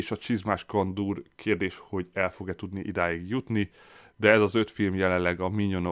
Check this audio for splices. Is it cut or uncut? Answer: uncut